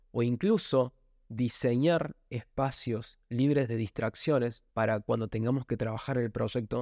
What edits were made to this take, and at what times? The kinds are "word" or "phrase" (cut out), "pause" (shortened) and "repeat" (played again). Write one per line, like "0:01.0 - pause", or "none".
0:04.7 - pause